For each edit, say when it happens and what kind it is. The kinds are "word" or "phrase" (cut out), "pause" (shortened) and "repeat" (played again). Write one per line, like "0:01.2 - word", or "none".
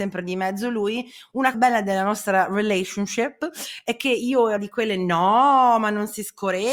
0:01.5 - word
0:04.6 - word